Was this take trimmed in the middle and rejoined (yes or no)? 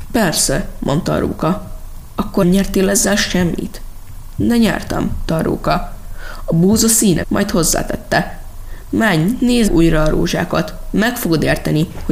yes